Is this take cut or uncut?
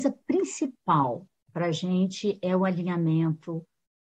uncut